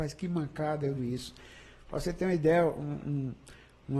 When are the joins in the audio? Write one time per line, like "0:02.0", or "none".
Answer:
0:01.0